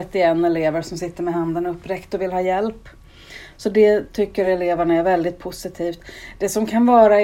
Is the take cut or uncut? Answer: uncut